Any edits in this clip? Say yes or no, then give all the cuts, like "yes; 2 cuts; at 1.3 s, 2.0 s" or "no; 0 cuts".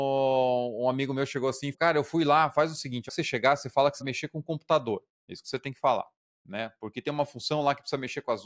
yes; 3 cuts; at 1.7 s, 3.1 s, 4.0 s